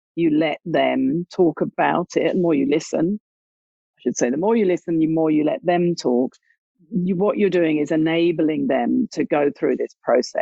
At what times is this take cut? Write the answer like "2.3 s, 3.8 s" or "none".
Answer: none

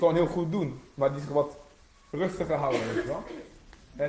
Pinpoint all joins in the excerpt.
none

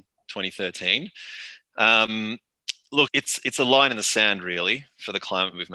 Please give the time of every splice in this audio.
3.1 s

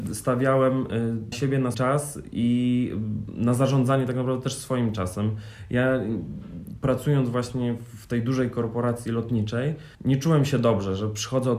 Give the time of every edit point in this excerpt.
1.3 s, 1.7 s, 9.9 s

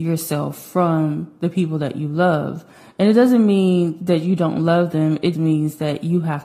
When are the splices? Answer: 5.3 s

